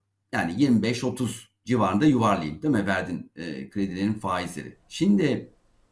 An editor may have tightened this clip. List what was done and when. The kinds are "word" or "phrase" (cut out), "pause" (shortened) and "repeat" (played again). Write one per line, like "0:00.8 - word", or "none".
0:04.8 - pause